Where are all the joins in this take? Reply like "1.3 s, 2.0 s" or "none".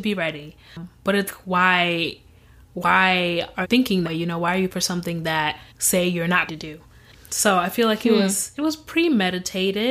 1.3 s, 3.6 s, 4.0 s, 4.7 s, 5.7 s, 6.5 s